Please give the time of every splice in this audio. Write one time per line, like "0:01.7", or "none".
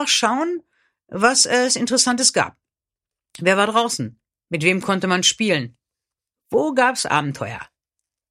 none